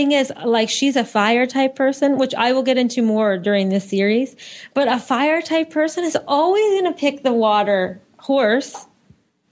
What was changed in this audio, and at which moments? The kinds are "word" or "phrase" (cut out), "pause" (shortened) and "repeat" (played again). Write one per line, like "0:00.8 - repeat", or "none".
none